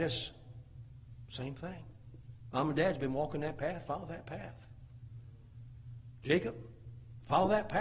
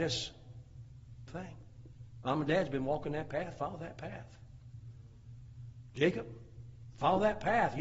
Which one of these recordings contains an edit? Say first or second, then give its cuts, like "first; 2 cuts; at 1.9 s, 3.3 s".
second; 1 cut; at 1.3 s